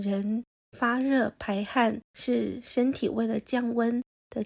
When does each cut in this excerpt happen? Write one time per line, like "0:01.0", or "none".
0:02.0